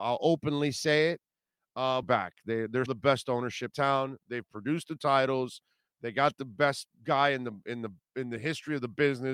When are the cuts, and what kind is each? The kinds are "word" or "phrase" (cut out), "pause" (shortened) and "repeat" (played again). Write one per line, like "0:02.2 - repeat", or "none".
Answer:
0:02.0 - phrase
0:02.9 - word
0:03.7 - word